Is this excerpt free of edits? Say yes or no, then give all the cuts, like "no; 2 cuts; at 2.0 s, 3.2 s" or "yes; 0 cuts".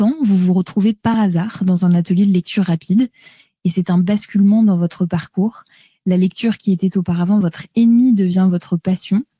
yes; 0 cuts